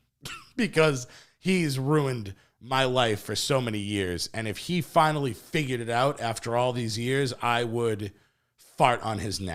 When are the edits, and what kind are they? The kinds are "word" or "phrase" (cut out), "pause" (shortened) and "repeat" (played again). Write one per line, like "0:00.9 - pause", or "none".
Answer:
none